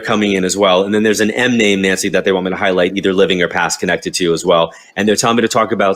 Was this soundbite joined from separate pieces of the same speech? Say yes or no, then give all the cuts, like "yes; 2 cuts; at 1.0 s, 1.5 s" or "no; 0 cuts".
no; 0 cuts